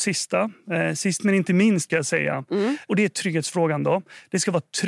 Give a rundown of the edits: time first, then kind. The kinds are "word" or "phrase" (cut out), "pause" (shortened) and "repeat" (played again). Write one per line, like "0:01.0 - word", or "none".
0:01.9 - word